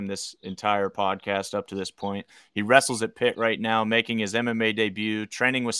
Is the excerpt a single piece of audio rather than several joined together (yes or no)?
yes